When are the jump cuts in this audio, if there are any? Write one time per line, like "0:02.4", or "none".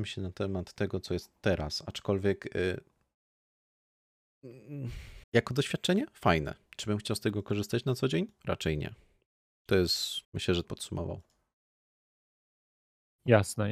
0:05.2
0:10.2
0:10.6